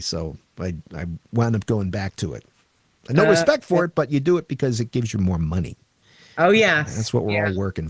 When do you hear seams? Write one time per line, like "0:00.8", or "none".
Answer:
none